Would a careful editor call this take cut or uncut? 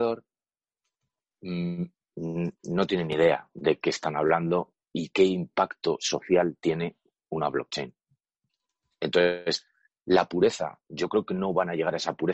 cut